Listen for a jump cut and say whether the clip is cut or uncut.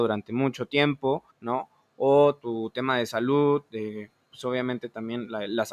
cut